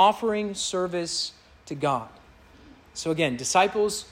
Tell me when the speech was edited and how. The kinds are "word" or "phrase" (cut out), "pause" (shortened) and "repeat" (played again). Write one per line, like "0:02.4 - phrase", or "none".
none